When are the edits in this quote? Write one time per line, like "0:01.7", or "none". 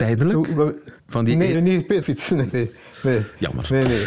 0:01.0
0:01.5
0:02.0
0:02.5

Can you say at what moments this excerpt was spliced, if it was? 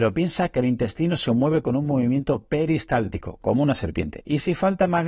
none

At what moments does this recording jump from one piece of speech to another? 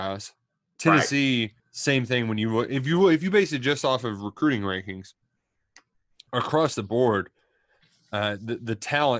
0:01.6

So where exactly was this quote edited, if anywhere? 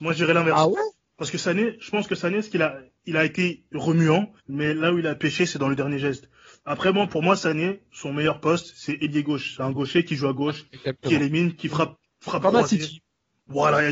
0:04.4

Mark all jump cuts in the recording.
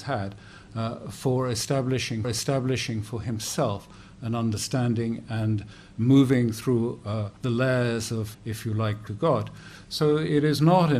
0:02.2
0:07.4
0:08.3
0:09.1

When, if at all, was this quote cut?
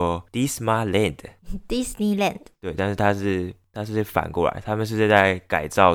0:02.5

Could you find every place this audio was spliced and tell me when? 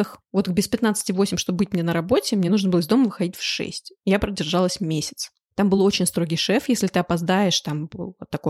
none

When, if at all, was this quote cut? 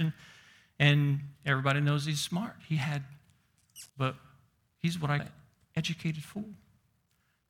0:03.9
0:05.2

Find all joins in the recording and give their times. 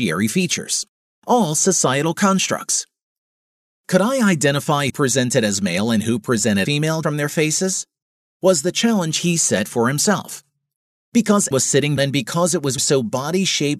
0:04.9
0:06.6
0:07.0
0:11.5
0:12.0
0:12.8

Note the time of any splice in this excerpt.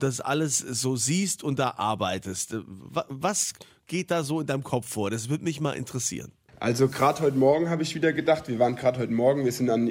none

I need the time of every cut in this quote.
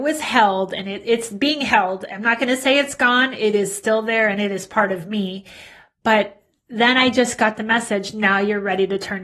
none

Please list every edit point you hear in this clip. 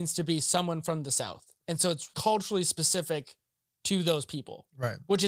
0:02.1

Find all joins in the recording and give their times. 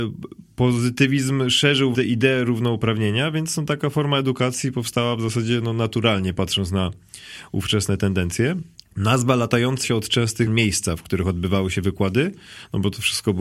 0:01.9
0:08.7
0:09.8
0:10.5

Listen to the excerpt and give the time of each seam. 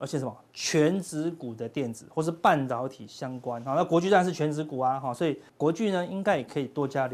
0:05.5

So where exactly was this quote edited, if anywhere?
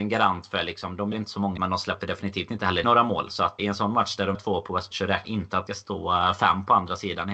0:01.1
0:01.6
0:02.8
0:03.6
0:04.3
0:04.9
0:05.2
0:05.7

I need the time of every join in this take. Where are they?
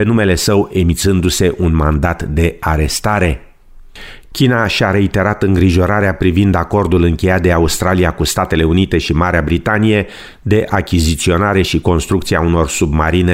none

